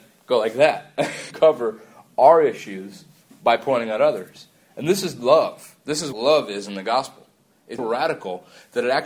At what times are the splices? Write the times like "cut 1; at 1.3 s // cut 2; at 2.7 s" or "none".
cut 1; at 1.3 s // cut 2; at 6.1 s // cut 3; at 7.8 s